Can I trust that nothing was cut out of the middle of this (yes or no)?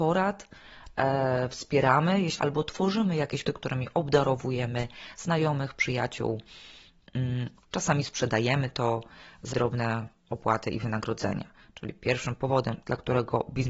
no